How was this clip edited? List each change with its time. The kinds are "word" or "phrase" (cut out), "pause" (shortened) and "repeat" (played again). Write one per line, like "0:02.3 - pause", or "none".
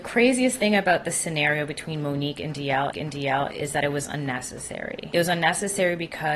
0:02.9 - repeat